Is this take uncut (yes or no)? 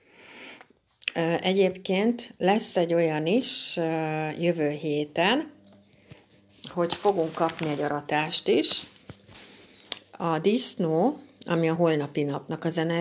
yes